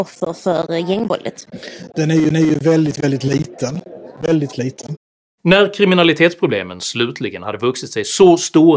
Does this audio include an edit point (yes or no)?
yes